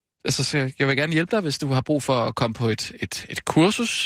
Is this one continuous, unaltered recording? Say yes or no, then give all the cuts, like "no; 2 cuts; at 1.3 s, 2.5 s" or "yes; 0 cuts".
yes; 0 cuts